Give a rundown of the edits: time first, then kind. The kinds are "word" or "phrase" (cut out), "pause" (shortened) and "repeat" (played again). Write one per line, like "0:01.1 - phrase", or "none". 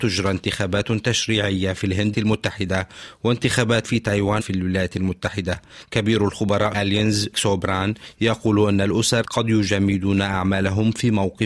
0:02.1 - word
0:03.8 - word
0:04.4 - word
0:06.7 - word
0:07.3 - word
0:09.2 - word